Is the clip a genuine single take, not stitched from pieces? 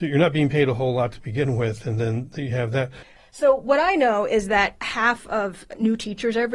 yes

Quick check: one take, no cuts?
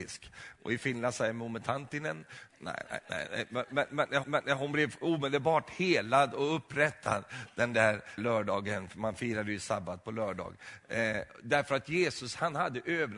no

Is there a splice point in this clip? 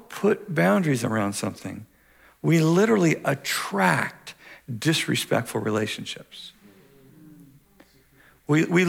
no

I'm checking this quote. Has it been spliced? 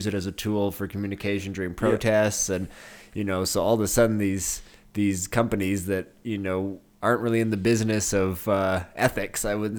no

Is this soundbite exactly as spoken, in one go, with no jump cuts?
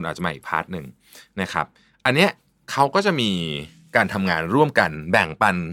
yes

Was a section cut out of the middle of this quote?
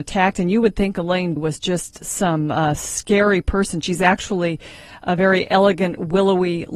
yes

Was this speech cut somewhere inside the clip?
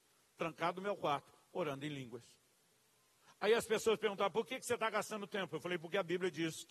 no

